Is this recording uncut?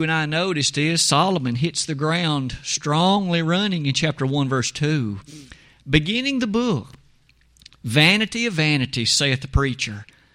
yes; 0 cuts

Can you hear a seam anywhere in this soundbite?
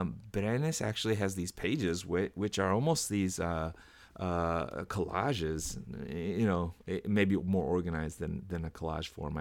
no; 0 cuts

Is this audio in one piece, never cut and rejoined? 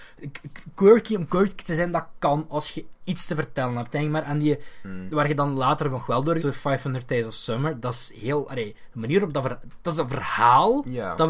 no; 1 cut; at 6.4 s

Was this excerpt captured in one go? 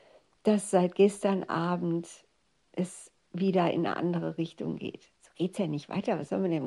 yes; 0 cuts

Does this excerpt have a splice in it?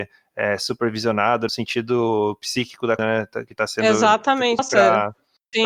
yes; 3 cuts; at 1.5 s, 3.0 s, 4.6 s

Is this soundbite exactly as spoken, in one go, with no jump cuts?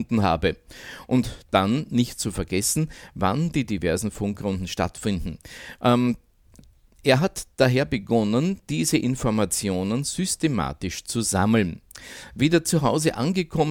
yes; 0 cuts

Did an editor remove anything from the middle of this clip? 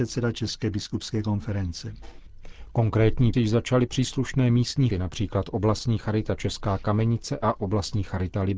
yes; 3 cuts; at 3.3 s, 3.9 s, 4.9 s

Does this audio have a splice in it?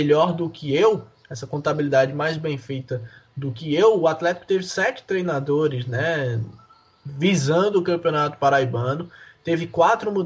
no; 0 cuts

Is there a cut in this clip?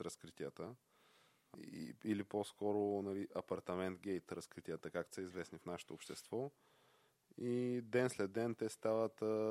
yes; 1 cut; at 1.5 s

